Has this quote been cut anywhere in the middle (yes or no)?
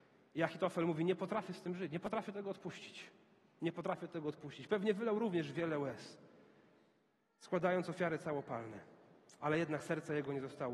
no